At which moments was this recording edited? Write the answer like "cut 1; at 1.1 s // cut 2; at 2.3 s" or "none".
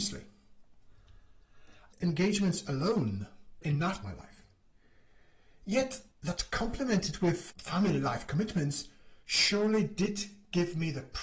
cut 1; at 1.9 s // cut 2; at 3.6 s // cut 3; at 4.0 s // cut 4; at 6.1 s // cut 5; at 7.5 s // cut 6; at 9.2 s